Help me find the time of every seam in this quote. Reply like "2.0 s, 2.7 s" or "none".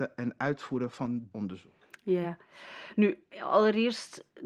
1.3 s, 2.2 s